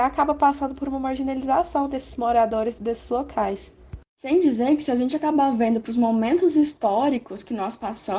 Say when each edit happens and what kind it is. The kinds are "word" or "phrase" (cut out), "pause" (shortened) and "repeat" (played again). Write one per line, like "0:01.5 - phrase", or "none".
0:02.8 - word
0:04.0 - pause